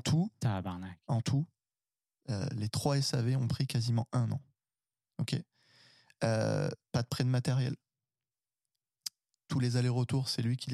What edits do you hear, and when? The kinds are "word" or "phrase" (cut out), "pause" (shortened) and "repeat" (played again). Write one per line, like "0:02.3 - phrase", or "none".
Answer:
none